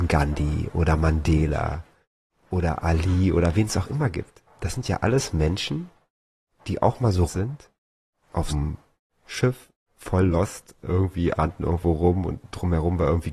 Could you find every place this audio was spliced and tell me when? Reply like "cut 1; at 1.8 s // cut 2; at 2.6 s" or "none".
cut 1; at 7.3 s // cut 2; at 8.5 s // cut 3; at 11.4 s